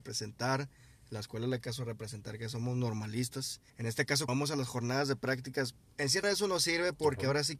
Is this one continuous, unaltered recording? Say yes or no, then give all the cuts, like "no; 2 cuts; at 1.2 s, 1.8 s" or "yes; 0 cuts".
no; 4 cuts; at 1.6 s, 3.7 s, 4.3 s, 6.2 s